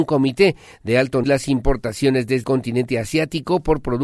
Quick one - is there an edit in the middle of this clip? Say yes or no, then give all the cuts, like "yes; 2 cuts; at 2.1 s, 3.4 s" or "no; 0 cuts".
yes; 2 cuts; at 1.2 s, 2.4 s